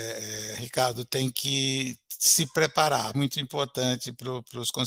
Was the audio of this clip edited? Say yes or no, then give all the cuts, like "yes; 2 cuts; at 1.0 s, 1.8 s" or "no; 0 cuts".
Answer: yes; 1 cut; at 3.1 s